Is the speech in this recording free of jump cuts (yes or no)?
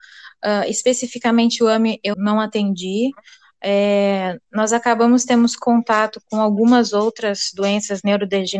no